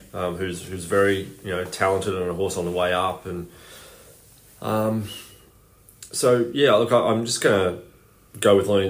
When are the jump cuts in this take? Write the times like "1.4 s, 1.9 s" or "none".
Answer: none